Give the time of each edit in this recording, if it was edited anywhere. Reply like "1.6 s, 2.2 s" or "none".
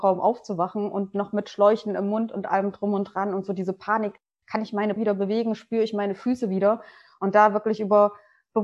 5.0 s